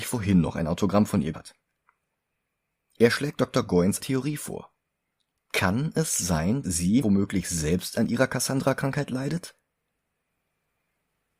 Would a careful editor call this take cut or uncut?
cut